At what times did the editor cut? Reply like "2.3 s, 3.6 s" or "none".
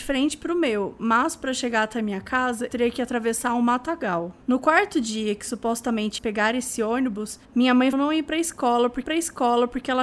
2.7 s, 4.4 s, 6.2 s, 7.4 s, 7.9 s, 9.1 s